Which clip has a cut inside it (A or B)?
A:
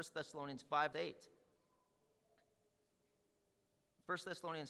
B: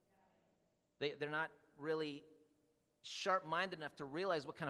A